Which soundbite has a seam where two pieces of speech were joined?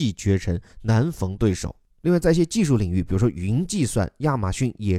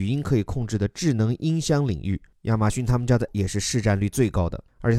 second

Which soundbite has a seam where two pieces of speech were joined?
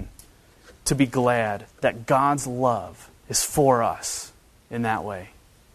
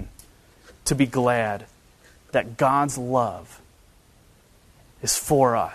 first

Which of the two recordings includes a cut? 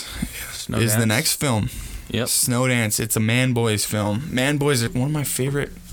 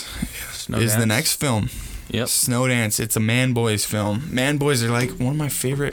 first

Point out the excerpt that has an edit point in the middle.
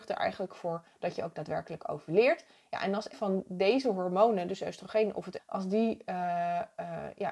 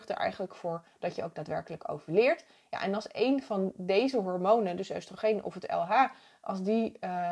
first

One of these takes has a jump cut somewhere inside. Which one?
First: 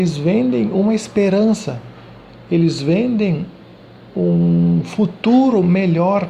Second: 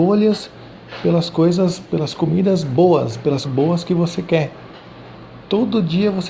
second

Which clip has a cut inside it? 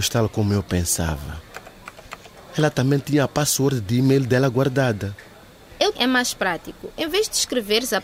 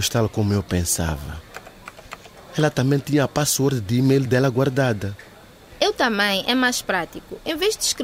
first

